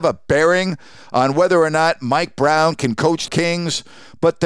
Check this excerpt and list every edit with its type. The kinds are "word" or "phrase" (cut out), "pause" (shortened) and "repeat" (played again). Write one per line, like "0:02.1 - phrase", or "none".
0:03.3 - phrase